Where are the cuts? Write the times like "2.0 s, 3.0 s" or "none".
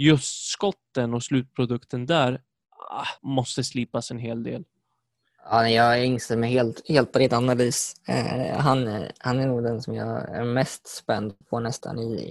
3.2 s, 5.1 s, 11.4 s